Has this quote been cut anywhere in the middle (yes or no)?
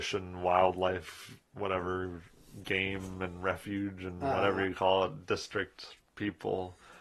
no